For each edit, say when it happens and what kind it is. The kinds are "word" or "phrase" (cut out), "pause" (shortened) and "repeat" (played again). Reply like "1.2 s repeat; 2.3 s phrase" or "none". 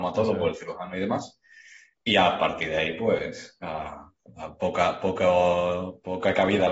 none